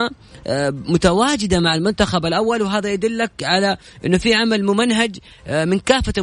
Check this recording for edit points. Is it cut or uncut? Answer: uncut